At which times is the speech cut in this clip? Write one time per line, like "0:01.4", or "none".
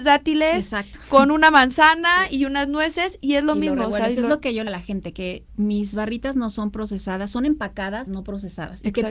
0:04.7
0:05.5
0:08.1